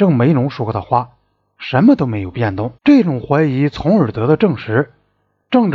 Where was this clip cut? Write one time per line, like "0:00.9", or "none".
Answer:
0:02.8